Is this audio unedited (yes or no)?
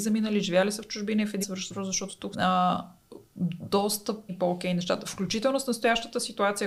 no